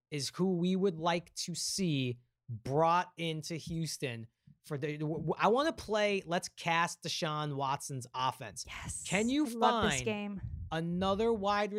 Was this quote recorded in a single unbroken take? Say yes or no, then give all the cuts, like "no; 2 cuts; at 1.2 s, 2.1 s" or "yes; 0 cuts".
yes; 0 cuts